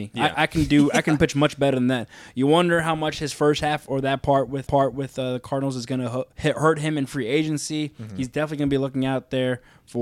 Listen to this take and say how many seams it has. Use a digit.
2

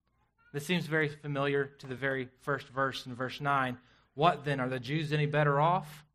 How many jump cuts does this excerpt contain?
0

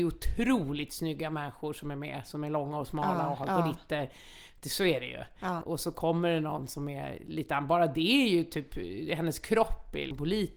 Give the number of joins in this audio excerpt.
0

